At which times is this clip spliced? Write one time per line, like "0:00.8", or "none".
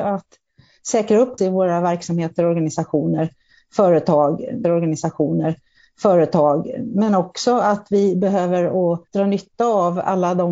0:01.4
0:04.6
0:09.1